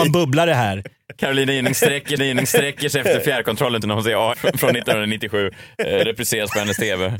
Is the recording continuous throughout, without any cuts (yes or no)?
no